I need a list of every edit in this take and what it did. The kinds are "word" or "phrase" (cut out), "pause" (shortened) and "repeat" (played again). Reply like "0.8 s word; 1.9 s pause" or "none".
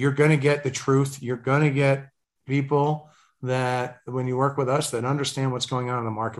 none